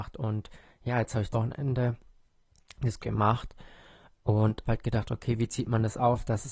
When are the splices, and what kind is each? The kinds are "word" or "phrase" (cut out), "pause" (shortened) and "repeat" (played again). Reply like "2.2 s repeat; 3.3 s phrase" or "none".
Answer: 1.3 s word; 3.0 s phrase; 4.6 s word